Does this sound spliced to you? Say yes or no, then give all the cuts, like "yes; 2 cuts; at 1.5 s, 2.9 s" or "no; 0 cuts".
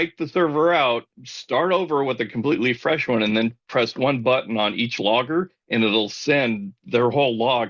no; 0 cuts